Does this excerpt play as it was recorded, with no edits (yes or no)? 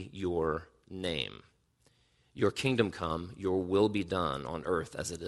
yes